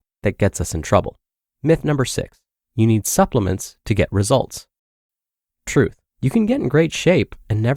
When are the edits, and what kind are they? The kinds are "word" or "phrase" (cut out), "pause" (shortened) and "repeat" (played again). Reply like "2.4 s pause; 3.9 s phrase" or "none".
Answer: 1.3 s pause; 2.5 s pause; 6.1 s pause